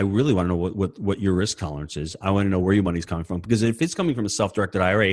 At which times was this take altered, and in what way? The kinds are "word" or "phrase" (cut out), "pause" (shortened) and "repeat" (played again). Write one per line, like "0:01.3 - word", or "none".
none